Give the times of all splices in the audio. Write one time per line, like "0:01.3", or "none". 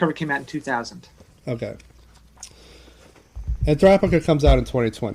none

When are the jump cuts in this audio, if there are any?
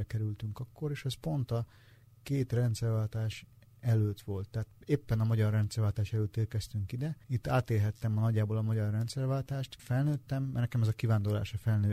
0:07.2
0:09.8

